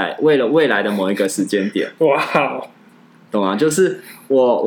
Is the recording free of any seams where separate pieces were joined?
yes; 0 cuts

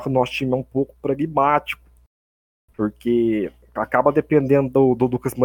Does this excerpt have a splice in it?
yes; 1 cut; at 3.8 s

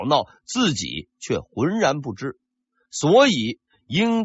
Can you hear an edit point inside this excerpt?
no; 0 cuts

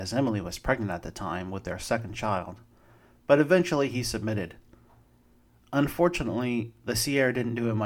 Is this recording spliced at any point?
no; 0 cuts

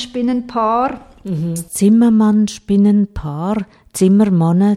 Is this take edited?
no; 0 cuts

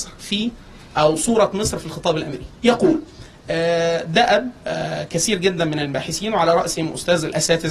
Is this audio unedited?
no; 1 cut; at 2.5 s

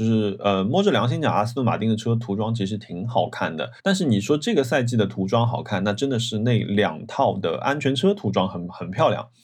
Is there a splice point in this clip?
yes; 1 cut; at 3.8 s

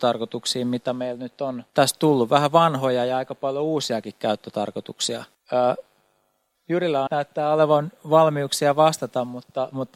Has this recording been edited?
yes; 3 cuts; at 1.7 s, 5.3 s, 7.1 s

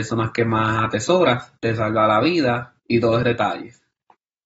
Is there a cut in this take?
yes; 3 cuts; at 1.6 s, 2.8 s, 3.2 s

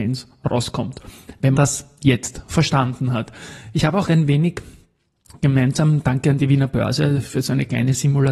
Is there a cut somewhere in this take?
yes; 2 cuts; at 1.6 s, 4.1 s

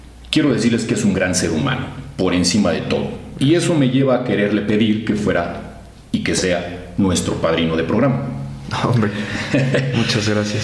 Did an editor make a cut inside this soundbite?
no; 0 cuts

